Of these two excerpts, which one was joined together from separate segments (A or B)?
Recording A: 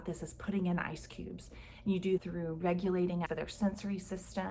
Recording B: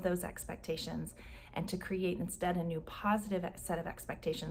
A